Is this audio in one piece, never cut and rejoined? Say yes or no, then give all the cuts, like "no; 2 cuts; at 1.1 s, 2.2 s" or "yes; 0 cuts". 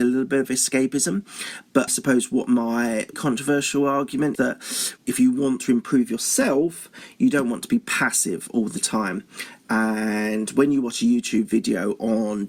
no; 4 cuts; at 1.9 s, 3.1 s, 4.3 s, 5.0 s